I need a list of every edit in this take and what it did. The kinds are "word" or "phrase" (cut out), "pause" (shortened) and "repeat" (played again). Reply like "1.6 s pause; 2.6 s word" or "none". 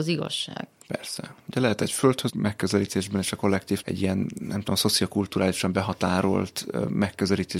2.3 s word; 3.8 s word